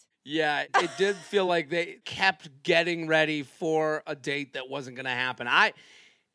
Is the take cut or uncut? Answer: uncut